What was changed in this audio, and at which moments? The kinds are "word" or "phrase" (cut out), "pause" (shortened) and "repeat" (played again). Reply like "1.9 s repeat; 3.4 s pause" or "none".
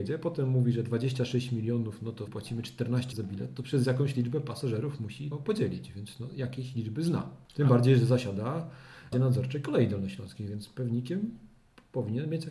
2.3 s word; 3.1 s word; 5.3 s word; 9.1 s word